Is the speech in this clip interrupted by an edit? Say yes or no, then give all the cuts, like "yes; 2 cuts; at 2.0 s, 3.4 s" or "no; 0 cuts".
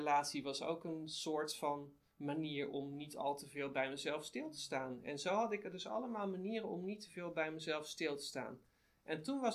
no; 0 cuts